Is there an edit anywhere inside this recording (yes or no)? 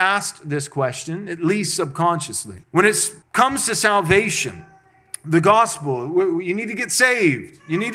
yes